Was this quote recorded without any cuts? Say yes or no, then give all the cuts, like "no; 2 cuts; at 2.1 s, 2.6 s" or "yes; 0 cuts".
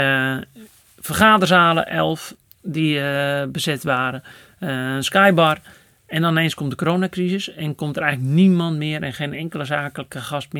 yes; 0 cuts